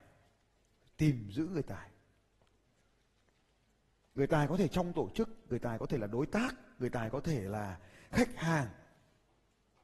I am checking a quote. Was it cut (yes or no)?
no